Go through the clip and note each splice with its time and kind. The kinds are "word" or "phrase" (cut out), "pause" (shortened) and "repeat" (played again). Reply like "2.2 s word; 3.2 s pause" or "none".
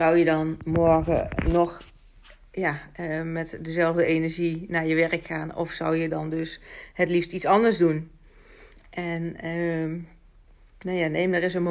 none